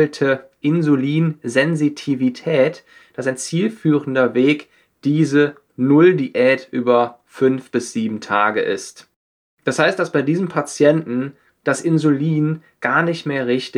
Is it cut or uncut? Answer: uncut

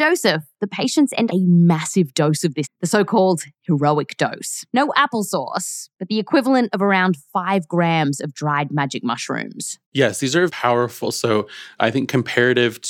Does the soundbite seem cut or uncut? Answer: cut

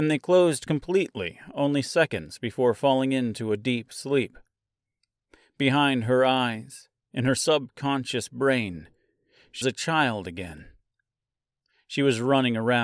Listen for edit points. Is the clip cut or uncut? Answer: cut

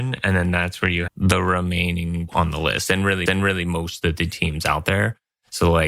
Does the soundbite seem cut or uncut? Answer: cut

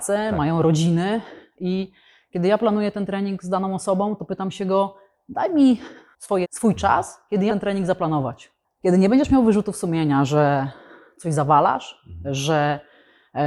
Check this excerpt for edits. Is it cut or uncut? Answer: cut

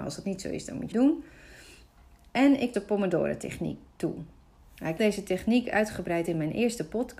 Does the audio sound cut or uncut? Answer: cut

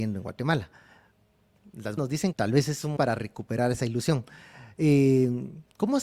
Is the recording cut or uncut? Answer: cut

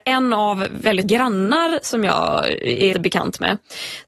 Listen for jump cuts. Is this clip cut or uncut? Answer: cut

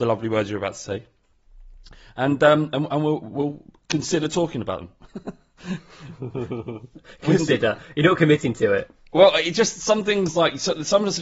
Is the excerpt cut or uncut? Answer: uncut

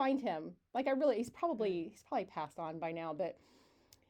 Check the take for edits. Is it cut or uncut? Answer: uncut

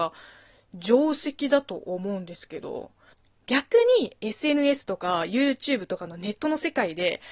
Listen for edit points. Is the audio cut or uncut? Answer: uncut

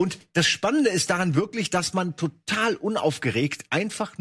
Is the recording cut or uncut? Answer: uncut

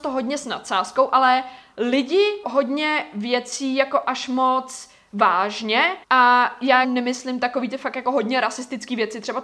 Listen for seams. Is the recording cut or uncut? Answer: cut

